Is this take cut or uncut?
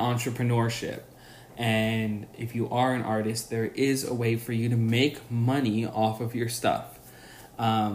uncut